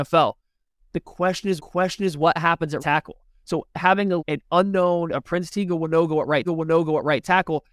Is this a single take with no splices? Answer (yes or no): no